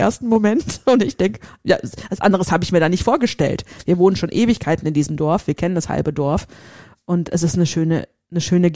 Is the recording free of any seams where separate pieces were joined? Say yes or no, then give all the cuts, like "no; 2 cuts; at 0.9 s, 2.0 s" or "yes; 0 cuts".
yes; 0 cuts